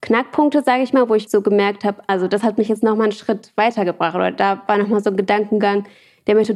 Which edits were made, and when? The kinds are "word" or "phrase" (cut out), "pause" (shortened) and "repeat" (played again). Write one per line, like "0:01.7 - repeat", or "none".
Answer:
0:01.3 - word
0:02.1 - word